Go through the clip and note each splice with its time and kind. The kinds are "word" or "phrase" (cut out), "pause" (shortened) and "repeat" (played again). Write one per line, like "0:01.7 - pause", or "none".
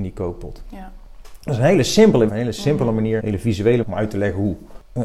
0:02.3 - word
0:03.2 - word
0:03.8 - phrase